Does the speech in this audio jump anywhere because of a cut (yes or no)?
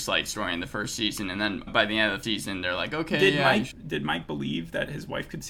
yes